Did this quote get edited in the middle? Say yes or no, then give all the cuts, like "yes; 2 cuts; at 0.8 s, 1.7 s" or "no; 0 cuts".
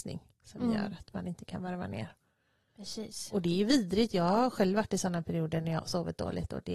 no; 0 cuts